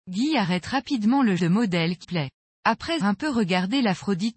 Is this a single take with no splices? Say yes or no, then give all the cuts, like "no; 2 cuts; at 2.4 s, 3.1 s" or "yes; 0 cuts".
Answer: no; 3 cuts; at 1.4 s, 2.0 s, 3.0 s